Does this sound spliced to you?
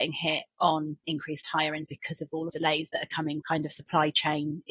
yes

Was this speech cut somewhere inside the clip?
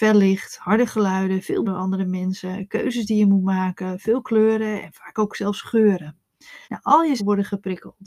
yes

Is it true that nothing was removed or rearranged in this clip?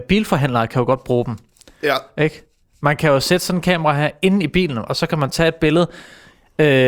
yes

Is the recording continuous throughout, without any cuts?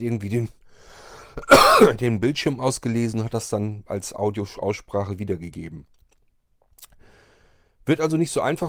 yes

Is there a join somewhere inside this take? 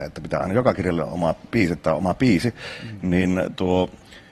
yes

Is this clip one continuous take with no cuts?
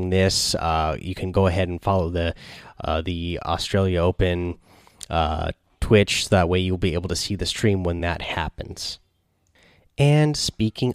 yes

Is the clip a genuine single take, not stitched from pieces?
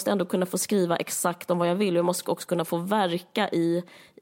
yes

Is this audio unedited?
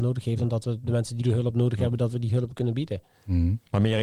no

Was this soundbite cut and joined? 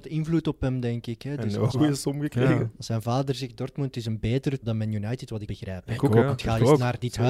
yes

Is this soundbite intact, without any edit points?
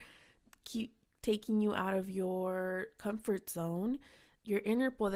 yes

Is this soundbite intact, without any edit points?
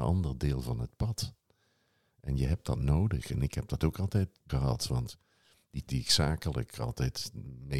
no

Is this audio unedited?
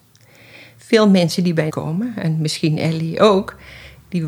no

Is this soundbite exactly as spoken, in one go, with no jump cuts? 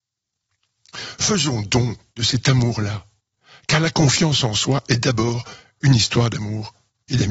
yes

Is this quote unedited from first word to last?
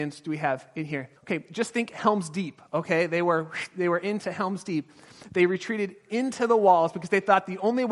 no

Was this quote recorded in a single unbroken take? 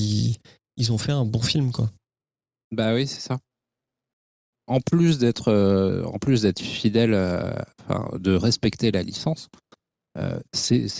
yes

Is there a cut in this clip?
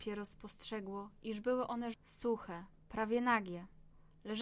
yes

